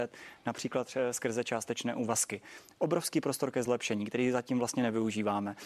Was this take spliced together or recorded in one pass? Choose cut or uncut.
uncut